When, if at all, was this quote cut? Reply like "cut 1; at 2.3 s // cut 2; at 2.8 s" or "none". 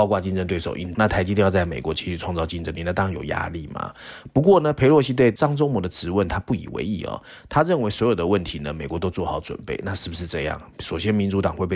cut 1; at 0.9 s

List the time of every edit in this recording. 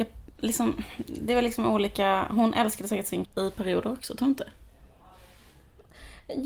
cut 1; at 3.2 s

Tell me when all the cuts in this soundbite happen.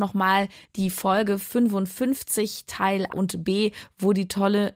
cut 1; at 3.1 s

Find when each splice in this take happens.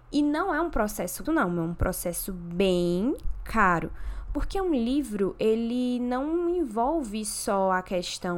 cut 1; at 1.2 s

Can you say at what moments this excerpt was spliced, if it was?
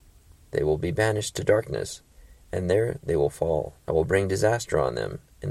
cut 1; at 3.8 s

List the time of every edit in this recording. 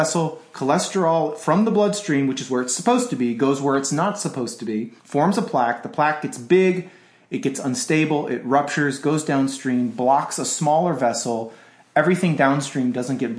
cut 1; at 5.0 s

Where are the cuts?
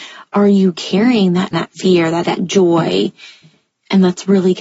cut 1; at 1.5 s // cut 2; at 2.2 s

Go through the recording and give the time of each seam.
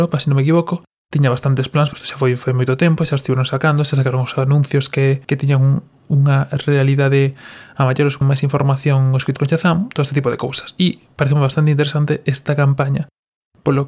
cut 1; at 0.9 s // cut 2; at 1.9 s // cut 3; at 5.2 s // cut 4; at 8.2 s // cut 5; at 9.4 s

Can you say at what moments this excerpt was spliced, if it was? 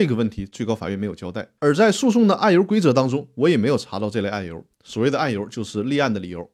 cut 1; at 1.6 s // cut 2; at 4.7 s

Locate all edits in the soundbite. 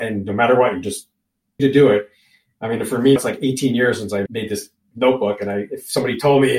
cut 1; at 1.6 s // cut 2; at 3.2 s // cut 3; at 4.3 s

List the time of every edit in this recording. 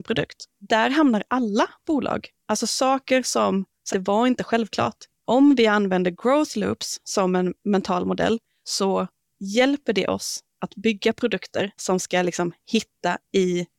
cut 1; at 2.4 s // cut 2; at 3.9 s // cut 3; at 11.8 s

